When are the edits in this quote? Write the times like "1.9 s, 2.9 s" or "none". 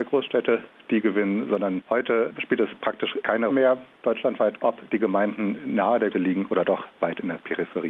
3.5 s, 4.6 s, 6.1 s

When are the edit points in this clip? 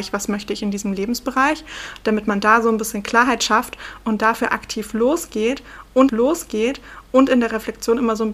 6.1 s

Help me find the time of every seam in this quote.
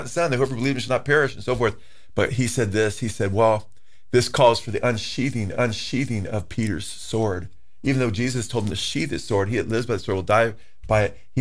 5.5 s

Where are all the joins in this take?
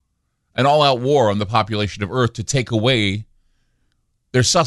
none

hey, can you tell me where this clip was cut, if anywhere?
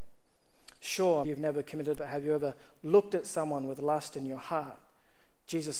1.2 s, 2.0 s

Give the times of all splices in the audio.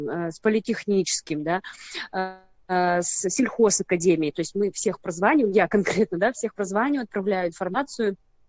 none

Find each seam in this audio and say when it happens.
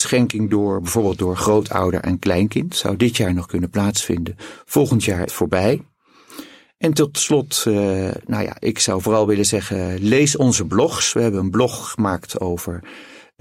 5.3 s

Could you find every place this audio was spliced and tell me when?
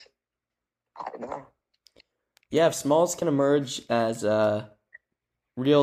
none

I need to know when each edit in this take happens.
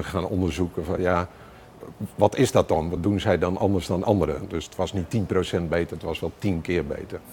none

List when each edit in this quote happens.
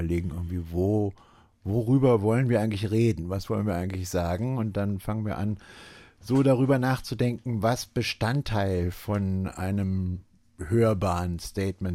none

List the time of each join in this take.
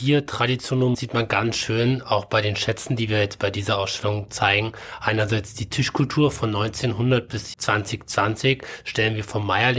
0.9 s, 7.5 s

